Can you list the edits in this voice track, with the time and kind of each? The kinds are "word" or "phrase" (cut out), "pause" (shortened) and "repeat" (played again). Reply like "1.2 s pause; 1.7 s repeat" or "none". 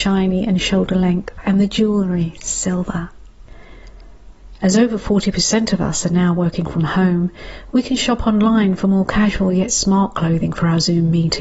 none